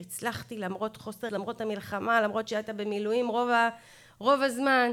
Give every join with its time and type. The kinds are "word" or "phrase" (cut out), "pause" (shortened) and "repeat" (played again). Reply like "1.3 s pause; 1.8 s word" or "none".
1.3 s word